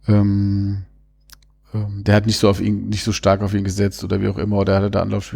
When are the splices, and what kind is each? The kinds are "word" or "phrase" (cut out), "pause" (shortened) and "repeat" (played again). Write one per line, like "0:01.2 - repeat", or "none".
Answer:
none

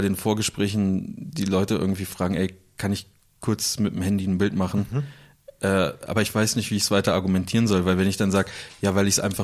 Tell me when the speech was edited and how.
none

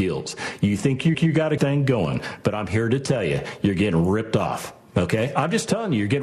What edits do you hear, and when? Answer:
0:01.1 - repeat
0:01.6 - word

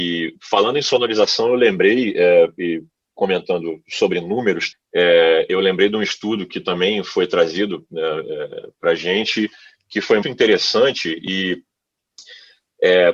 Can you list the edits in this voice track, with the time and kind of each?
0:04.7 - word
0:10.2 - word

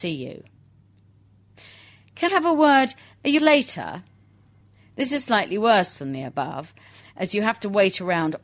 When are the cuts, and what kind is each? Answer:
0:02.3 - word
0:03.4 - word

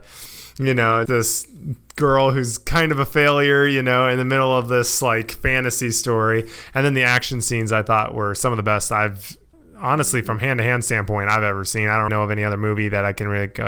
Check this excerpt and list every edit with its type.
0:01.1 - word
0:09.5 - pause
0:12.1 - word

